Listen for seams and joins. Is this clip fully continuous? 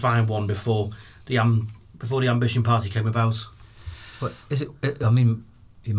yes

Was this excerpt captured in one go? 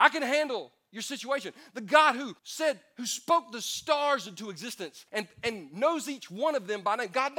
no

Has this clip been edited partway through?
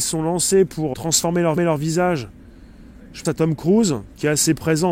yes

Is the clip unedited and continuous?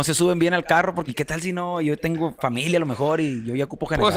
no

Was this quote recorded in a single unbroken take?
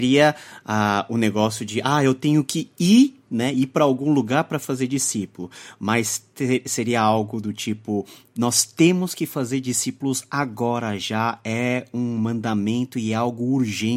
yes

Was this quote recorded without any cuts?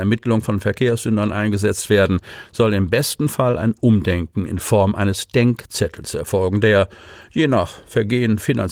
yes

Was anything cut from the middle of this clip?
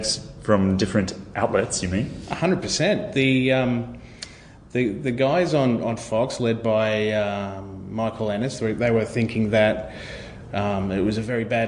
no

